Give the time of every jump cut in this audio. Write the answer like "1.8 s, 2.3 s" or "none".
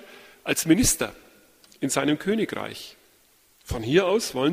none